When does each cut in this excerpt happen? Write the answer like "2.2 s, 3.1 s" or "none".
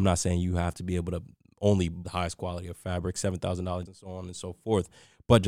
2.0 s, 3.9 s